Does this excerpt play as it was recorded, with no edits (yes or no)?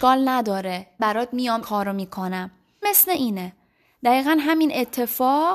no